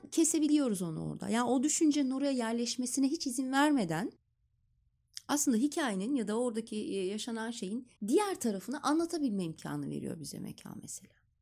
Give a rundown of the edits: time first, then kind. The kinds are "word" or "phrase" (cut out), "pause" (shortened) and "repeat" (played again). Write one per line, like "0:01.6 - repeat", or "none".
0:08.0 - pause

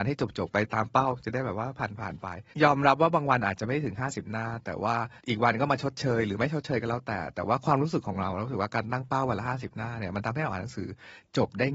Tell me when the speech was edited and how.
0:02.5 - pause
0:05.2 - pause

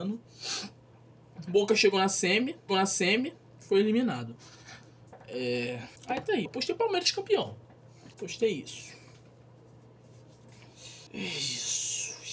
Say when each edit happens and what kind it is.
0:02.7 - repeat
0:06.0 - pause
0:06.5 - word
0:08.1 - pause
0:11.1 - pause

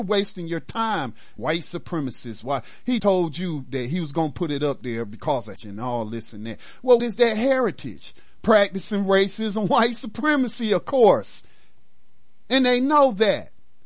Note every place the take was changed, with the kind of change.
0:01.4 - word
0:03.0 - word
0:05.6 - word
0:07.0 - word

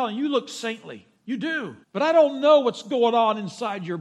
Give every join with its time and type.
0:01.1 - pause
0:01.8 - pause

